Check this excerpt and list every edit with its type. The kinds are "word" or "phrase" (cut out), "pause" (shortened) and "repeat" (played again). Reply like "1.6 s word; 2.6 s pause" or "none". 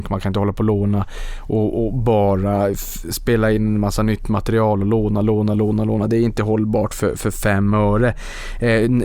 none